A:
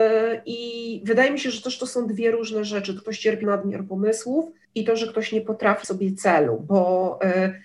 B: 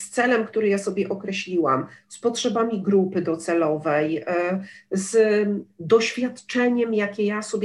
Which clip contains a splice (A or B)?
A